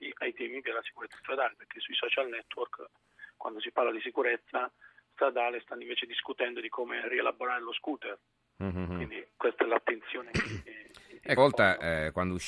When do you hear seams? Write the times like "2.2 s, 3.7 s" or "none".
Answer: 11.4 s